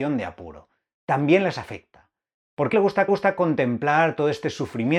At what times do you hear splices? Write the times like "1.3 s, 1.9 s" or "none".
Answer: 2.7 s, 3.1 s